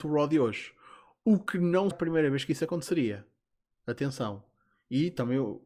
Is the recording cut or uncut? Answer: cut